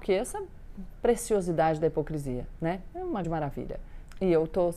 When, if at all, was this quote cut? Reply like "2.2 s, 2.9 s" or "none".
3.2 s